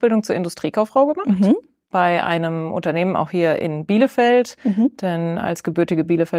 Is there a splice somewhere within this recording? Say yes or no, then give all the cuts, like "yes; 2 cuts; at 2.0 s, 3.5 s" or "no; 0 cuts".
no; 0 cuts